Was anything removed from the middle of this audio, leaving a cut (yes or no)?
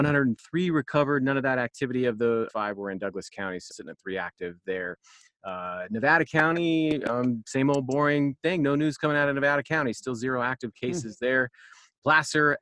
yes